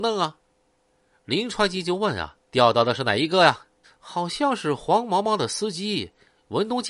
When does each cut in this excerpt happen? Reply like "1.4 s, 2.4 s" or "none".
2.4 s, 3.8 s